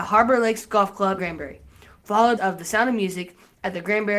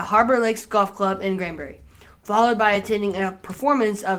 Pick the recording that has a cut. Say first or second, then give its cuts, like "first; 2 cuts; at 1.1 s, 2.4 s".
first; 2 cuts; at 1.2 s, 2.4 s